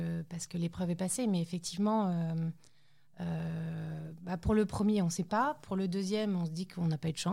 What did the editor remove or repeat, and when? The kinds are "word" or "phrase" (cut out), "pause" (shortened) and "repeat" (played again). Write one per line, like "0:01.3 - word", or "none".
none